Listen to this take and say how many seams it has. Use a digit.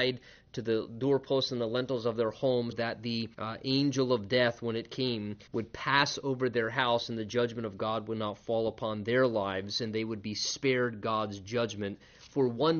3